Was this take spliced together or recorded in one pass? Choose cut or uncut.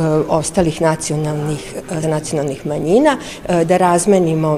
cut